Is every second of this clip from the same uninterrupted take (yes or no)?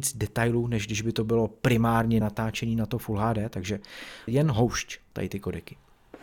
no